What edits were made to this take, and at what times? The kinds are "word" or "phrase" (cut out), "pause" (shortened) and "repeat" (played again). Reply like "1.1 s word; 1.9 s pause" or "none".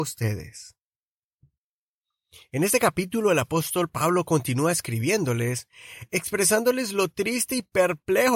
none